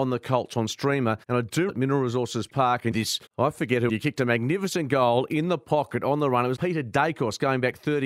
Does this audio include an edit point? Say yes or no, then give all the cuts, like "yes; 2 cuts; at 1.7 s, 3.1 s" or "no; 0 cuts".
yes; 6 cuts; at 1.2 s, 1.7 s, 2.9 s, 3.3 s, 3.9 s, 6.6 s